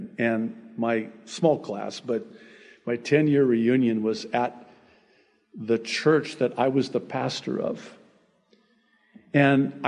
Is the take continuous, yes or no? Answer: yes